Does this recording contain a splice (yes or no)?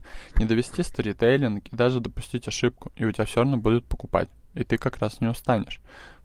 no